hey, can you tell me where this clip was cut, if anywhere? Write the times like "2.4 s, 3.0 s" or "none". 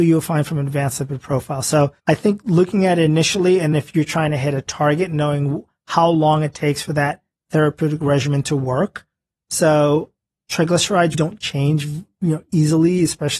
2.0 s, 3.7 s, 11.1 s

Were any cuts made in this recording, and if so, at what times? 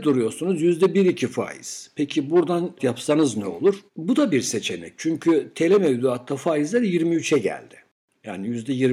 2.8 s, 3.9 s

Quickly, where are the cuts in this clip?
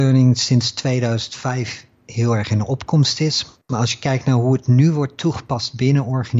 none

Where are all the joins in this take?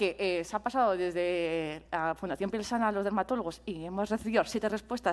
none

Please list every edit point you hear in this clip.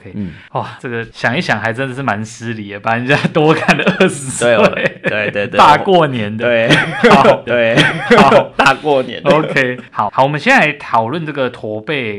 7.5 s

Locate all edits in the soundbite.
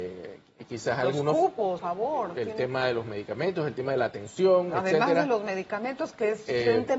1.8 s

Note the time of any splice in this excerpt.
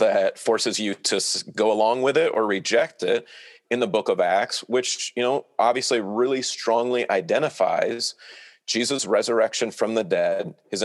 none

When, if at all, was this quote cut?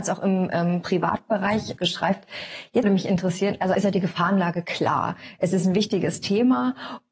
1.8 s, 2.8 s, 3.7 s

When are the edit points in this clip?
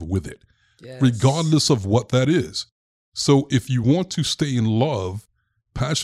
none

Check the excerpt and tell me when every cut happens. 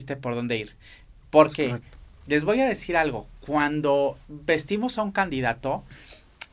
4.2 s

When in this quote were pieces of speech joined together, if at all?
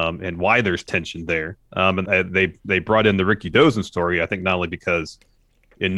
1.6 s, 2.0 s

